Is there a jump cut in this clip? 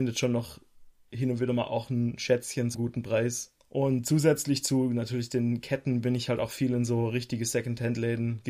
yes; 2 cuts; at 2.7 s, 3.6 s

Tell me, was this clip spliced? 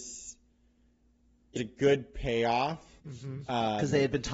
yes; 2 cuts; at 1.6 s, 3.0 s

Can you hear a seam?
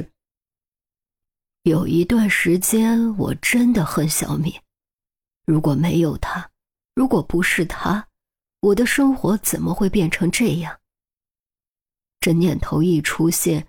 no; 0 cuts

